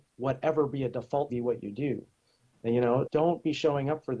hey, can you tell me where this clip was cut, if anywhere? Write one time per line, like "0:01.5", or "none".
0:01.3
0:03.0